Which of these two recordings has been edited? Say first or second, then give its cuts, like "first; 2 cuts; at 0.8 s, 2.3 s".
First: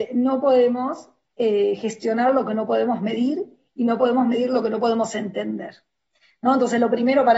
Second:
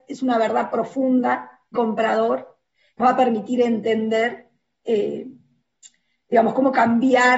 second; 3 cuts; at 1.8 s, 3.0 s, 4.7 s